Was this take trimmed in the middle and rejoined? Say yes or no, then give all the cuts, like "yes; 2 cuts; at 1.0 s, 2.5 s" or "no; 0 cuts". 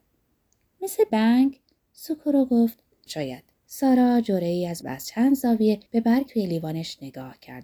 yes; 7 cuts; at 1.1 s, 1.8 s, 3.1 s, 3.5 s, 4.8 s, 5.9 s, 6.3 s